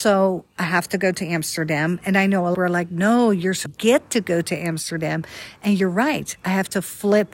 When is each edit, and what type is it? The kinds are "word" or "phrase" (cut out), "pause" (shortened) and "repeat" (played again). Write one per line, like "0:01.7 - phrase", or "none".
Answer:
0:02.5 - phrase
0:03.7 - phrase